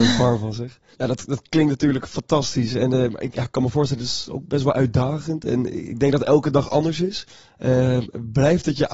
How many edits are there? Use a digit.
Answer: 0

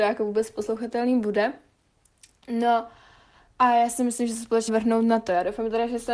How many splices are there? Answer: 1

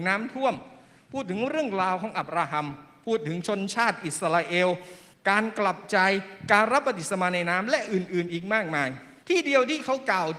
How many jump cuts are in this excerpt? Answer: 2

